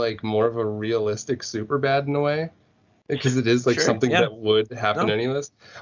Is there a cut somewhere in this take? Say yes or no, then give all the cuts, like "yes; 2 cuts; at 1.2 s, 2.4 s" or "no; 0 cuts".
no; 0 cuts